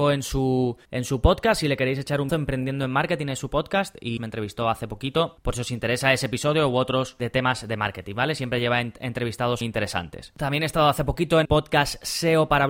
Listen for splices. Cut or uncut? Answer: cut